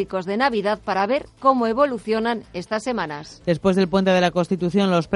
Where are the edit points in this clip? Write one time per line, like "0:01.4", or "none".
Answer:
none

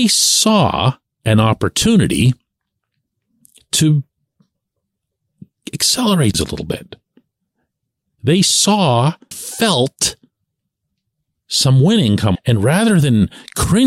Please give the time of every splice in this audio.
0:06.3
0:09.3
0:12.4

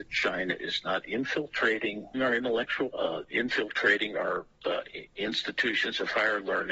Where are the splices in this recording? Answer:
0:02.1
0:02.9
0:04.5

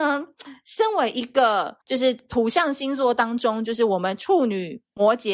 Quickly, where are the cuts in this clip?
0:01.8

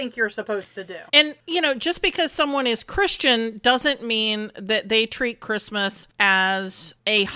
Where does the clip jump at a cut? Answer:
0:01.1

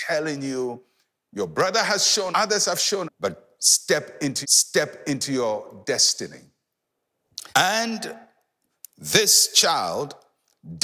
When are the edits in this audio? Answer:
0:02.3
0:03.0
0:04.4
0:07.5

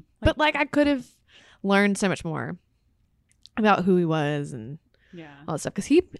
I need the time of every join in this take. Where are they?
none

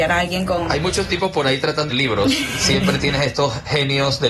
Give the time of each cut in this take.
0:01.9

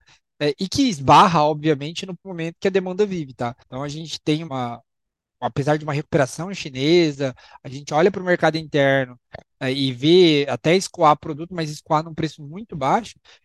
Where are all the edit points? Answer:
0:02.2
0:03.6
0:04.5

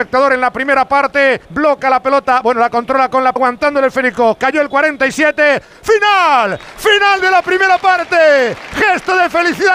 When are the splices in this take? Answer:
0:01.4
0:03.4

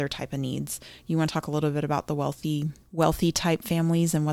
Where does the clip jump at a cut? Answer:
0:02.8

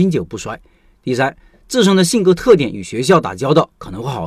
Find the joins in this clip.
none

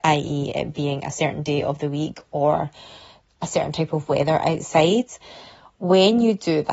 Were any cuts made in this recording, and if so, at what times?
none

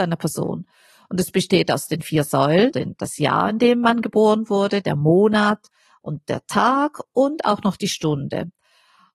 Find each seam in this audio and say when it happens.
0:02.7

